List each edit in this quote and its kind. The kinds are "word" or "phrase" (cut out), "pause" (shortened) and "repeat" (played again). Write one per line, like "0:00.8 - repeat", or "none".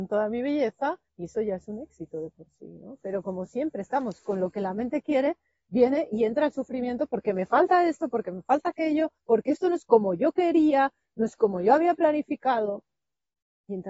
0:01.1 - pause
0:09.2 - pause